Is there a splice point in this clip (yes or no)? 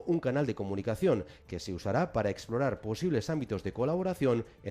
no